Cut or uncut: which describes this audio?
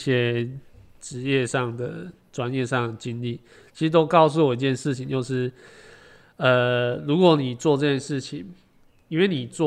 uncut